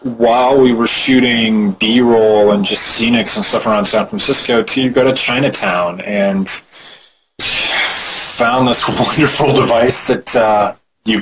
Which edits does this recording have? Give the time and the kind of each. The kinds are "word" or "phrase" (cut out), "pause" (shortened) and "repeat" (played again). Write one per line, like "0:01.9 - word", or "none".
none